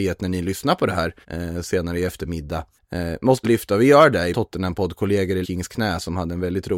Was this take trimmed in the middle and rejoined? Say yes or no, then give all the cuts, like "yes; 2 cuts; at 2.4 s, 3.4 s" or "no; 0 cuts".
yes; 5 cuts; at 1.2 s, 2.8 s, 3.4 s, 4.3 s, 5.4 s